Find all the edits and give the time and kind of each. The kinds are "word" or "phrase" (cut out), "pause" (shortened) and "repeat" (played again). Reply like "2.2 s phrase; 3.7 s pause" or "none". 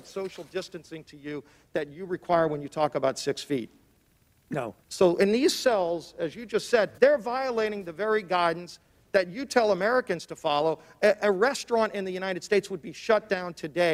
4.8 s pause; 7.0 s pause